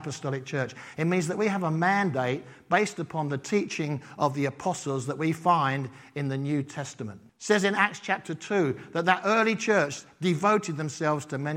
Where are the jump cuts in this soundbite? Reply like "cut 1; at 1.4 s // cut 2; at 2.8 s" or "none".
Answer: cut 1; at 7.3 s